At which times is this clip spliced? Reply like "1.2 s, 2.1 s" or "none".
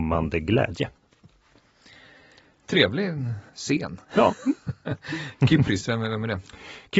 3.5 s